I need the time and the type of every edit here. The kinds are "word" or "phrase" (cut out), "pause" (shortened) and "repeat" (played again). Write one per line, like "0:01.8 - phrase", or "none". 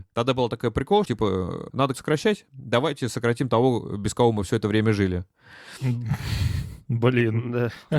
0:01.0 - word
0:01.9 - word